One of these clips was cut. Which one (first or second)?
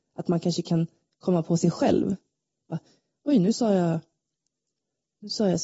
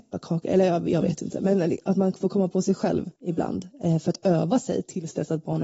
second